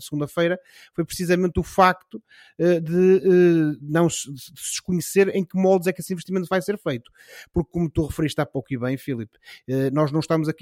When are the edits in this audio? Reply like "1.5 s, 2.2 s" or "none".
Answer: none